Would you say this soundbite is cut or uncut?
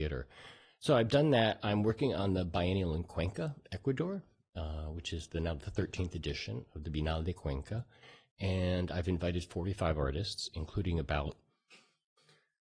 uncut